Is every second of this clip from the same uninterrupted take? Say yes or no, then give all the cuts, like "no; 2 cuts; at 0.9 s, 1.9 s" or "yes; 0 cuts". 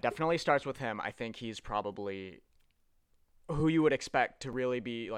yes; 0 cuts